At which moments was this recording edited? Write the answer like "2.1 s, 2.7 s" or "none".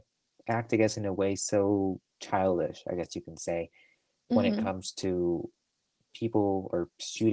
none